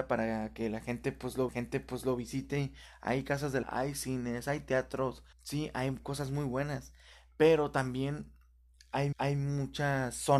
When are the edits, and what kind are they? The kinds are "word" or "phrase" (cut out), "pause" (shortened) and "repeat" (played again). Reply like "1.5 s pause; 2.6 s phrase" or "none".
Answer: 1.5 s repeat; 3.6 s phrase; 5.3 s pause; 9.1 s repeat